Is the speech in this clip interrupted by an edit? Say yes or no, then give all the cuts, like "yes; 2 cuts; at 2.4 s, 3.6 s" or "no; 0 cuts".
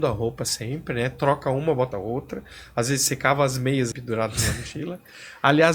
yes; 2 cuts; at 1.9 s, 3.9 s